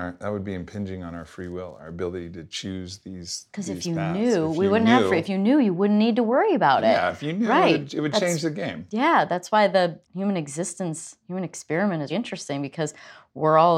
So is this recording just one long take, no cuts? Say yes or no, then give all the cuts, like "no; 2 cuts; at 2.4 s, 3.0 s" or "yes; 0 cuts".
no; 2 cuts; at 10.0 s, 12.1 s